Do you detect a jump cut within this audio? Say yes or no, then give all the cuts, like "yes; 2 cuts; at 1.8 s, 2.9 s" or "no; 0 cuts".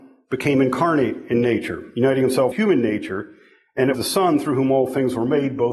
yes; 2 cuts; at 2.5 s, 3.9 s